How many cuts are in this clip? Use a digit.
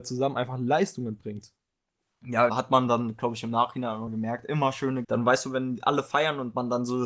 3